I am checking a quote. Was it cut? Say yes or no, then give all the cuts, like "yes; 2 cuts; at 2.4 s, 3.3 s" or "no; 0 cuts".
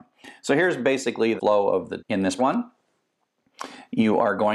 yes; 3 cuts; at 1.4 s, 2.0 s, 2.4 s